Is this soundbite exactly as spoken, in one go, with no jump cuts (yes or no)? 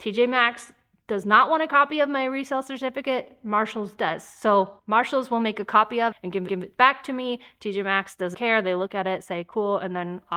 no